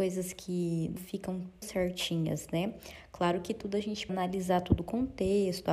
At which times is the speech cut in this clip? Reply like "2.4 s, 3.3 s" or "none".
1.0 s, 1.6 s, 4.1 s